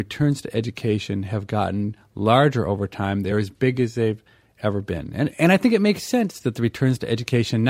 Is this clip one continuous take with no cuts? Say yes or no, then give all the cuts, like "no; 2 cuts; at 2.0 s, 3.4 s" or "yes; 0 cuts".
yes; 0 cuts